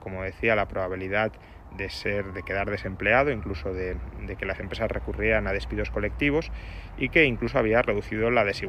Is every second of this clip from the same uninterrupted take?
no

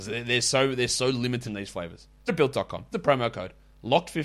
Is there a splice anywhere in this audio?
yes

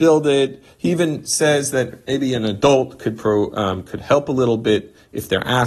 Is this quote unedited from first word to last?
yes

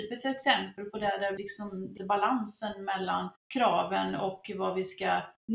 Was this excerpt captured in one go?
no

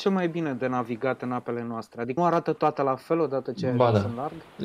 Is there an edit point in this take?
yes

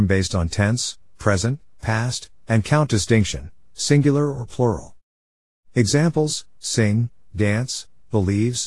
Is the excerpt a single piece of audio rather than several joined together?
yes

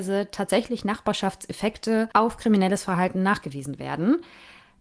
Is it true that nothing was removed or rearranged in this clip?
no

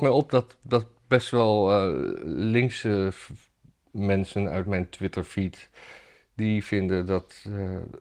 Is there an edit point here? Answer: no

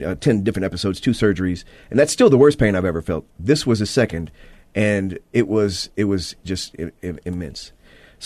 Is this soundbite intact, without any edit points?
yes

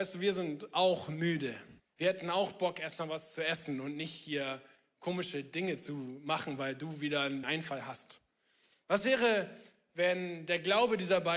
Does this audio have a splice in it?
yes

